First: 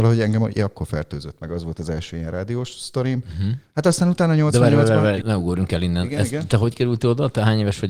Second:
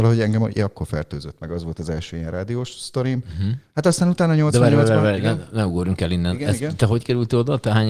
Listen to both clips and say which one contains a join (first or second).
first